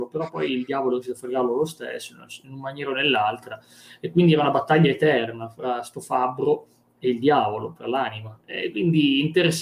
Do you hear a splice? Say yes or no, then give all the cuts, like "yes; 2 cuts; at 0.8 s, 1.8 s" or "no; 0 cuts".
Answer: no; 0 cuts